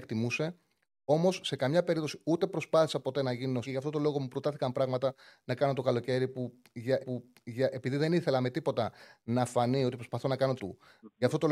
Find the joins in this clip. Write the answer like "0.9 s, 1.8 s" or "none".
3.6 s, 7.0 s, 10.6 s